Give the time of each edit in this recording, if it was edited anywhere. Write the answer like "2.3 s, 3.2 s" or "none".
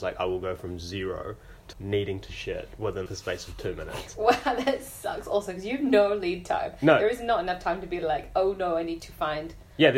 1.7 s, 3.1 s